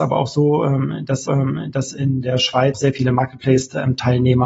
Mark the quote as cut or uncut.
cut